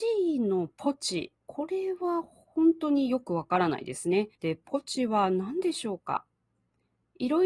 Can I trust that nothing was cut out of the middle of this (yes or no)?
no